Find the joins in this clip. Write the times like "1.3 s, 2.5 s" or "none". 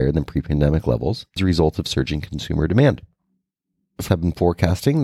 1.4 s, 4.1 s